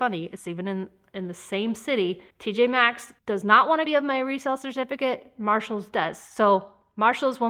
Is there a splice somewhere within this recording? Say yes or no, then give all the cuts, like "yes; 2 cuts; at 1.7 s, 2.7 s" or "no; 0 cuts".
yes; 3 cuts; at 2.3 s, 3.2 s, 3.9 s